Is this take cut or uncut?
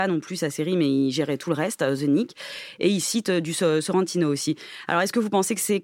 uncut